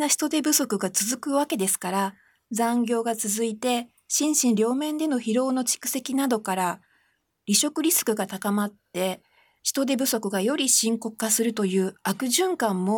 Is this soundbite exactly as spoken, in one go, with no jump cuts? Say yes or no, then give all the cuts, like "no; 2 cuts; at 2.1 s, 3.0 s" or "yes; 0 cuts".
yes; 0 cuts